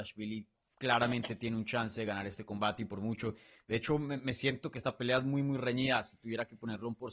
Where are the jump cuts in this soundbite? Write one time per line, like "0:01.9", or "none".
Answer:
none